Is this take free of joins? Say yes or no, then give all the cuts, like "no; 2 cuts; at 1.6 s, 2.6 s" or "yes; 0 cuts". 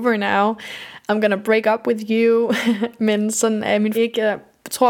no; 2 cuts; at 3.3 s, 3.9 s